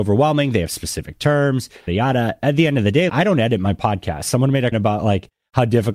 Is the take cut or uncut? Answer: cut